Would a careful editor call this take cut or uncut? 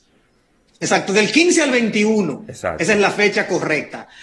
uncut